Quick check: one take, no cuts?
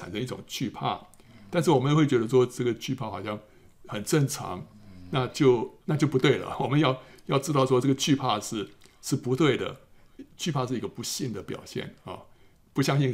no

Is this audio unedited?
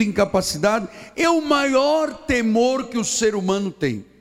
yes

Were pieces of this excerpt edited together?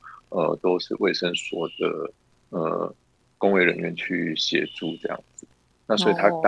no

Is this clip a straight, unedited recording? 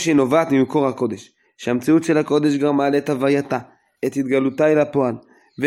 yes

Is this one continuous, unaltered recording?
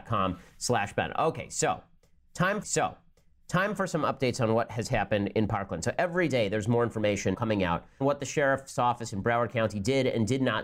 no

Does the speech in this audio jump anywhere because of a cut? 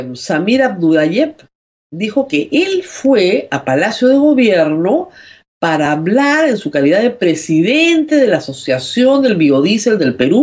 no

